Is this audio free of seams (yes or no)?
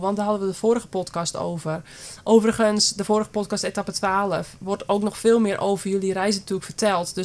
yes